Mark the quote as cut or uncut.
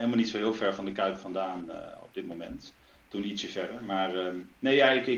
uncut